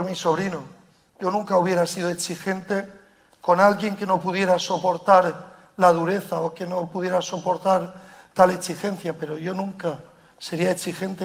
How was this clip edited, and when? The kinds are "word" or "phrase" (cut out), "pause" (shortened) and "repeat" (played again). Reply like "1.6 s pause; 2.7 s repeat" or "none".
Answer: none